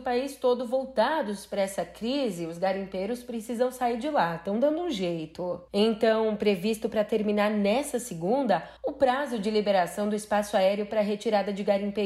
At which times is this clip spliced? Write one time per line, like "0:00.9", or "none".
0:08.8